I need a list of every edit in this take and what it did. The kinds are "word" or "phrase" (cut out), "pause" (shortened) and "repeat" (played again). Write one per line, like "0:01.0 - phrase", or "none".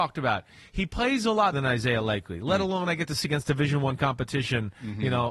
0:01.5 - word
0:03.2 - word